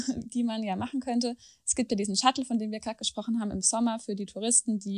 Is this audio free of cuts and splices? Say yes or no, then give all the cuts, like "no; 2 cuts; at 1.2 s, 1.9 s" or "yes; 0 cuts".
yes; 0 cuts